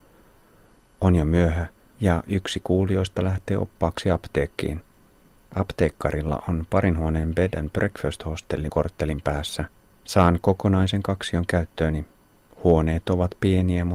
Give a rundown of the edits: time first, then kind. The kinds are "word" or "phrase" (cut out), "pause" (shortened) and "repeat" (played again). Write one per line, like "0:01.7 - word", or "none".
0:08.7 - word
0:09.8 - pause

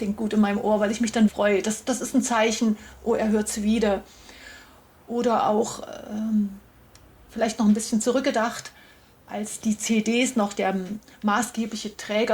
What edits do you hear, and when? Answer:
0:01.3 - word

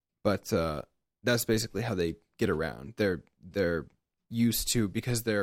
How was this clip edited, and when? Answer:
none

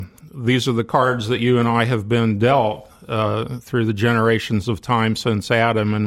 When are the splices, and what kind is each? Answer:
none

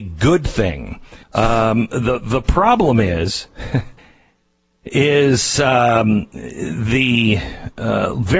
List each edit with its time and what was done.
0:01.2 - pause
0:04.0 - pause

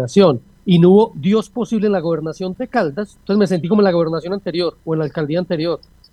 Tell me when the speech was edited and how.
0:04.8 - pause

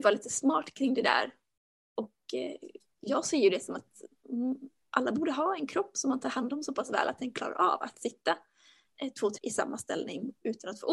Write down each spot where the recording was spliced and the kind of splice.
0:09.4 - word

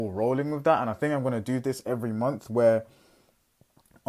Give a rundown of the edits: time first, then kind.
none

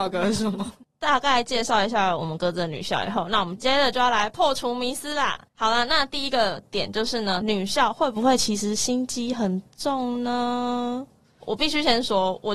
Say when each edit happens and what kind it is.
0:05.5 - pause

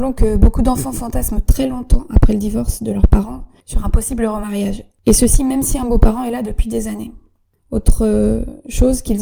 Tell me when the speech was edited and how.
none

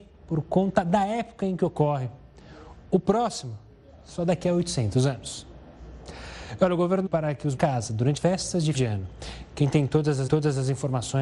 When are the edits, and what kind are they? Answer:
0:07.1 - phrase
0:07.6 - phrase
0:08.2 - word
0:08.7 - word
0:10.3 - repeat

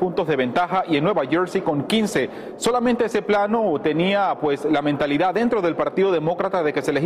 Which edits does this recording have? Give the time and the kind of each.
none

